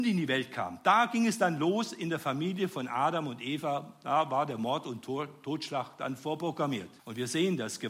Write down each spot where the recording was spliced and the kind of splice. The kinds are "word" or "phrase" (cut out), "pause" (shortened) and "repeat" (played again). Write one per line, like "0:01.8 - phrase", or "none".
0:07.0 - pause